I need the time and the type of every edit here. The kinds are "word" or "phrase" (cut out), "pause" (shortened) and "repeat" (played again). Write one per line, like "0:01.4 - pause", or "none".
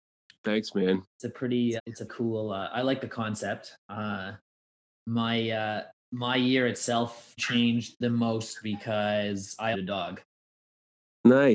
0:01.8 - word
0:02.1 - word
0:07.4 - word
0:09.7 - phrase